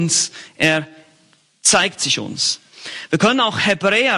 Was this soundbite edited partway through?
yes; 1 cut; at 2.0 s

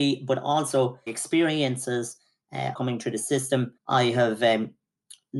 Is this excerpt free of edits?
no; 3 cuts; at 1.1 s, 2.7 s, 3.8 s

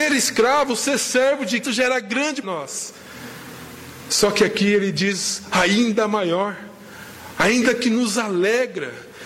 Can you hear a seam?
yes; 3 cuts; at 1.6 s, 2.4 s, 5.5 s

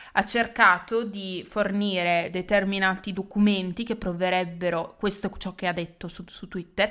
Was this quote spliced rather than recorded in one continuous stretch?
no; 0 cuts

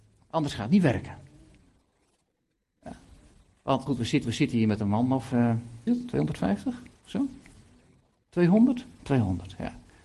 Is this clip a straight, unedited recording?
no; 4 cuts; at 3.9 s, 4.2 s, 5.9 s, 7.0 s

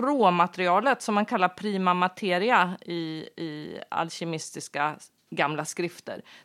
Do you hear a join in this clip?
no; 0 cuts

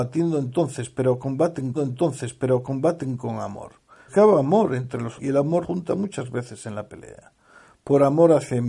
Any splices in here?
yes; 4 cuts; at 1.7 s, 4.1 s, 5.2 s, 5.6 s

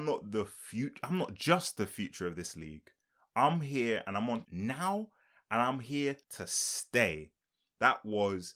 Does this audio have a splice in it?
yes; 2 cuts; at 4.4 s, 6.2 s

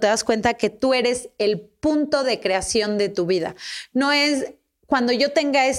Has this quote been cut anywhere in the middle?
no; 0 cuts

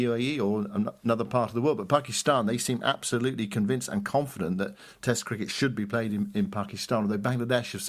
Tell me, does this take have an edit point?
no; 0 cuts

